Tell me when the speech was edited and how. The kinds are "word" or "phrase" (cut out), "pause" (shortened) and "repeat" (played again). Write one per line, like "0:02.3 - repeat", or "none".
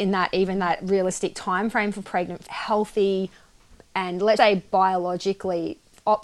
0:02.0 - word
0:02.5 - word
0:04.4 - word